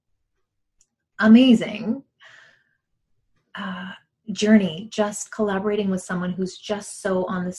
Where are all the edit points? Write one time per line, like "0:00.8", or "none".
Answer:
none